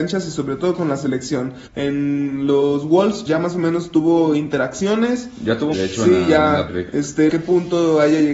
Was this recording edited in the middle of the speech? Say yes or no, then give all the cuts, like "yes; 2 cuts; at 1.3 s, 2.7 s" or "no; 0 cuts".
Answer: yes; 5 cuts; at 1.7 s, 3.3 s, 5.7 s, 6.7 s, 7.3 s